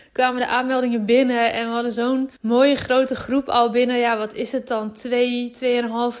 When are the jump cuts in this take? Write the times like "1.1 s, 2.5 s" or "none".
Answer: 2.4 s